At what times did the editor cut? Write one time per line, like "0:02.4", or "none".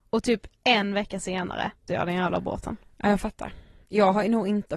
0:01.9

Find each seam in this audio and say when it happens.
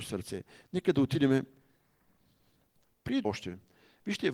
0:03.2

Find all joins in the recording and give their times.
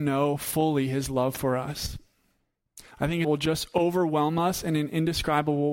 0:02.9
0:03.2

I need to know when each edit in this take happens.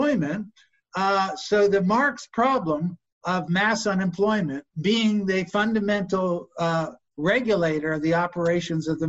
0:04.7

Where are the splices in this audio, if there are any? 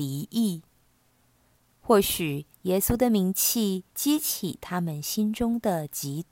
0:02.5
0:03.9

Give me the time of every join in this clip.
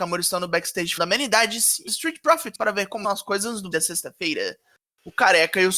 0:01.0
0:01.9
0:02.5
0:03.0
0:03.7

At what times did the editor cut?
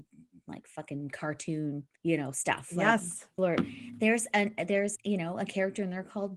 0:02.0
0:03.4
0:05.0

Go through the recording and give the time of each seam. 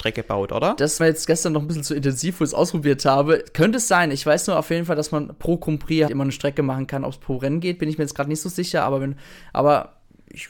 0:01.0
0:06.1

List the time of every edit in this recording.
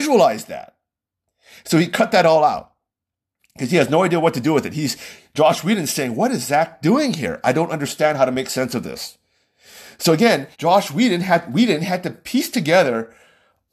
0:10.5

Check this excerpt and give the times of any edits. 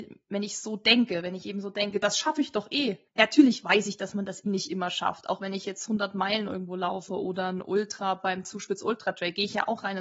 0:03.1
0:04.5

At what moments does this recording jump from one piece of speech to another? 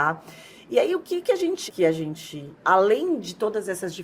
0:01.7
0:02.6

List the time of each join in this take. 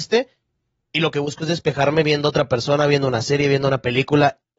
none

